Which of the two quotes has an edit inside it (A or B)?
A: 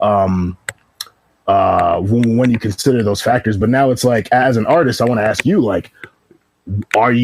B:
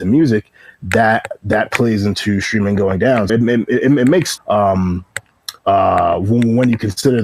B